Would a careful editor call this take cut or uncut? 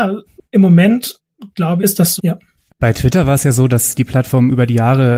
cut